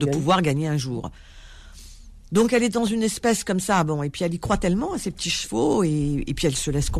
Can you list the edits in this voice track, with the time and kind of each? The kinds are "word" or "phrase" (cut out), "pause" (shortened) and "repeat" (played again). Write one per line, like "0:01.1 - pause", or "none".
none